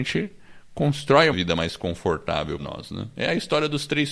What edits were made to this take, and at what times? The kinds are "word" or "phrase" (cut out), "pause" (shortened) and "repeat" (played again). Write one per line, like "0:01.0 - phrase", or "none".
0:01.3 - word
0:02.6 - word

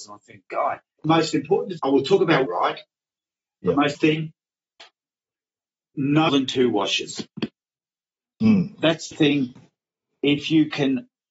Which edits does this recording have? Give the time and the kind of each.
0:01.0 - word
0:01.8 - word
0:02.5 - word
0:03.9 - word
0:06.3 - word
0:09.1 - word

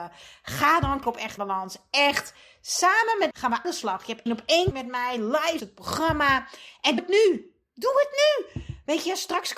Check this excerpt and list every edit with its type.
0:01.0 - word
0:01.4 - word
0:03.3 - word
0:03.6 - word
0:04.3 - word
0:04.7 - word
0:05.6 - word
0:07.0 - word

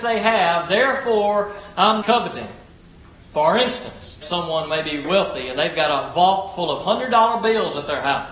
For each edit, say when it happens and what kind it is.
0:02.0 - word
0:04.2 - word
0:05.0 - word

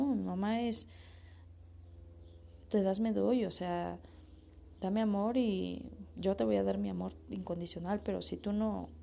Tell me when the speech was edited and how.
none

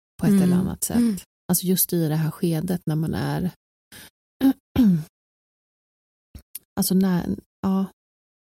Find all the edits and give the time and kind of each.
0:01.3 - pause

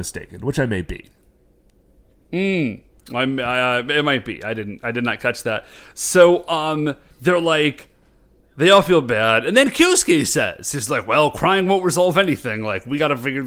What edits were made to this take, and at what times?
0:07.1 - pause

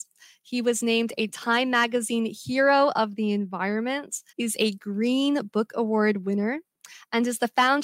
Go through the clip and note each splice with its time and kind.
0:04.3 - pause

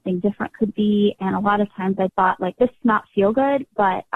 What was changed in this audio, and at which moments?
0:02.1 - word
0:02.8 - word

